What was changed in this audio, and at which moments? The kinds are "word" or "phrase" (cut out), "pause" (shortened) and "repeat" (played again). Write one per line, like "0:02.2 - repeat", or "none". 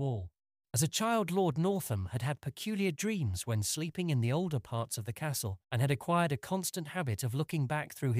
0:05.6 - pause

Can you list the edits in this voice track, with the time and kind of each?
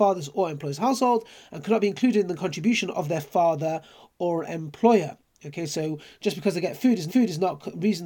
0:07.1 - repeat

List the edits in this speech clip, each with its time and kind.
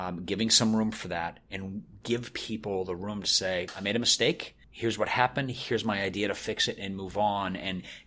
0:04.6 - pause

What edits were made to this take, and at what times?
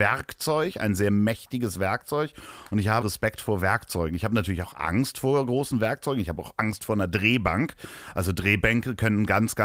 0:03.0 - word

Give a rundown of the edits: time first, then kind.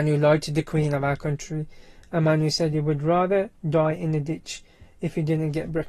0:03.6 - pause

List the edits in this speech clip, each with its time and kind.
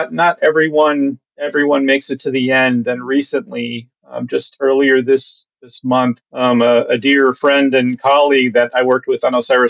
0:06.3 - pause

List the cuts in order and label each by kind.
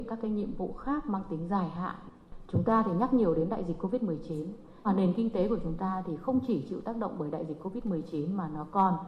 0:04.8 - word

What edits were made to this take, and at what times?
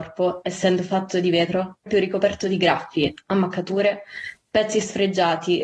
0:01.9 - word

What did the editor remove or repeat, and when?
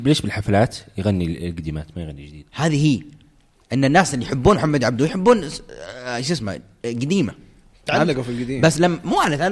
none

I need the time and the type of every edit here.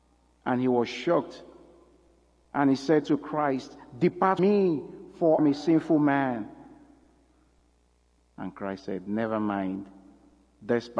0:04.4 - word
0:05.4 - word

